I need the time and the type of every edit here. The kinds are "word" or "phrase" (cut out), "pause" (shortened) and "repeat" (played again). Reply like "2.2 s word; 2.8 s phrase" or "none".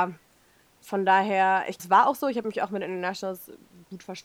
1.8 s word